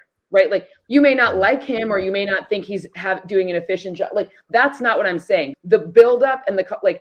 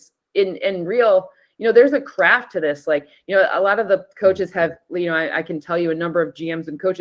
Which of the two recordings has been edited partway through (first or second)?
first